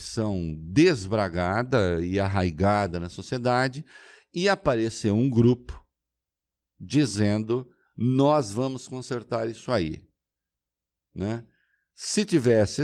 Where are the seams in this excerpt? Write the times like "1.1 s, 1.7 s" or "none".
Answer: none